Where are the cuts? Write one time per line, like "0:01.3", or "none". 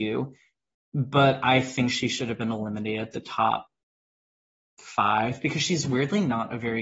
none